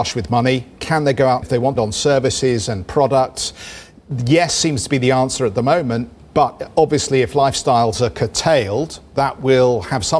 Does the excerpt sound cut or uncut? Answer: cut